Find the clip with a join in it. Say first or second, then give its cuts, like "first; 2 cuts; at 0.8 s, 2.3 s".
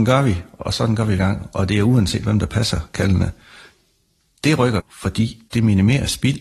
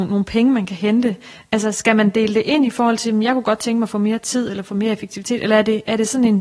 first; 3 cuts; at 1.2 s, 4.8 s, 5.5 s